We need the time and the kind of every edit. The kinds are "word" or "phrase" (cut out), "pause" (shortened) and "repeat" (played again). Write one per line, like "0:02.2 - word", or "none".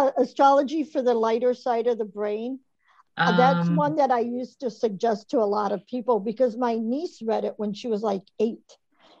none